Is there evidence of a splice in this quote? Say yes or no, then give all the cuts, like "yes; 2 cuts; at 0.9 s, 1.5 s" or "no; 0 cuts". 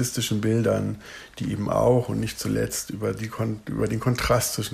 no; 0 cuts